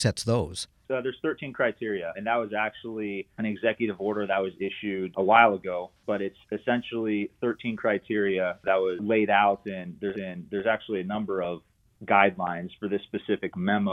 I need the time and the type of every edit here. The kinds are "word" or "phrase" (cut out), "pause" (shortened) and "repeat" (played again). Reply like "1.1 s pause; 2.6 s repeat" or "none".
10.1 s repeat